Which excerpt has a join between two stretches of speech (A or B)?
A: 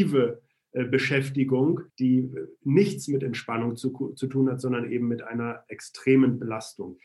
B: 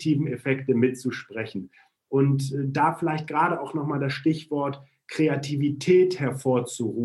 A